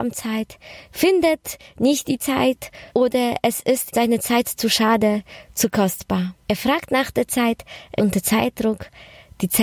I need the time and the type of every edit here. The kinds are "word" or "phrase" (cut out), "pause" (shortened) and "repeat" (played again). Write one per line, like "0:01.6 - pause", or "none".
0:02.9 - pause
0:03.9 - word
0:06.4 - pause
0:08.0 - word